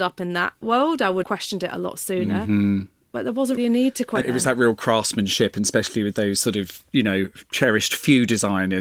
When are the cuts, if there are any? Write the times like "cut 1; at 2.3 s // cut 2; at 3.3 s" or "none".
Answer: cut 1; at 1.2 s // cut 2; at 3.6 s // cut 3; at 4.2 s